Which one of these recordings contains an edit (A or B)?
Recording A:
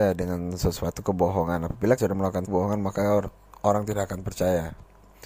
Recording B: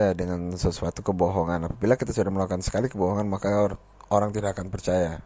A